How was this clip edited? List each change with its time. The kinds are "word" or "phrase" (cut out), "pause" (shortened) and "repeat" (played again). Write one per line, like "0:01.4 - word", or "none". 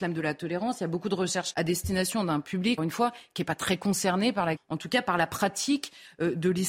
0:01.5 - word
0:02.8 - word
0:04.6 - word